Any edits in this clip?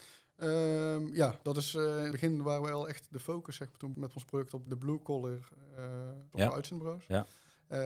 yes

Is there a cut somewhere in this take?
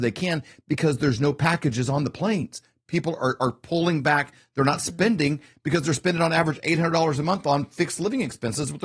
no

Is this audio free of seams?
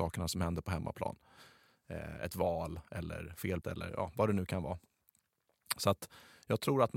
no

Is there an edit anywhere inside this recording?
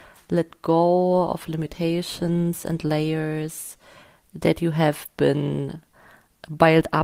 no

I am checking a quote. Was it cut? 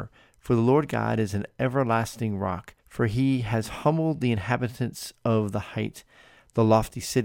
yes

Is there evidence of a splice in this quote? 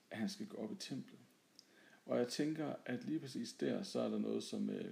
no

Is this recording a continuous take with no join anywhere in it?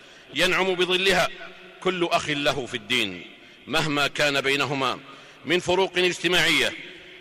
yes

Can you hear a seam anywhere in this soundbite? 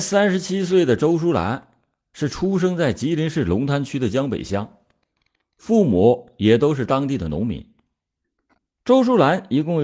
no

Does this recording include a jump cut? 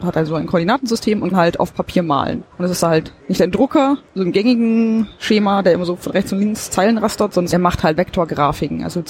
yes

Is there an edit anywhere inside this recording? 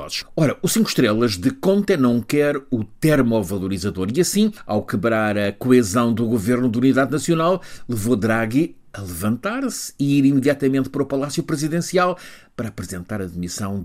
no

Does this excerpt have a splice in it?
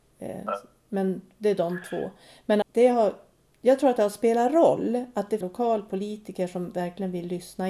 yes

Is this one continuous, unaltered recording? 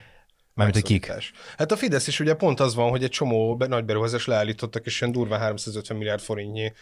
yes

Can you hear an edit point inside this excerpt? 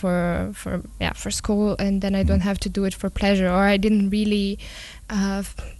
no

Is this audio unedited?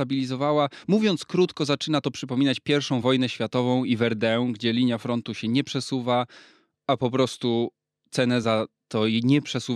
yes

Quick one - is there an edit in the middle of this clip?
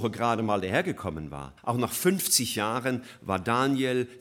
yes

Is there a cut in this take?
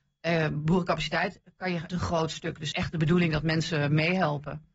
yes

